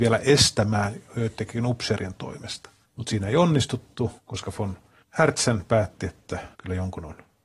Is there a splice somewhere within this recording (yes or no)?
yes